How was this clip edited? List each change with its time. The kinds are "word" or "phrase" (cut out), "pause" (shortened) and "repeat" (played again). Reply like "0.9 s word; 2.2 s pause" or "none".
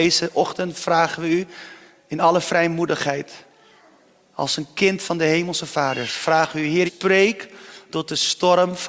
6.9 s word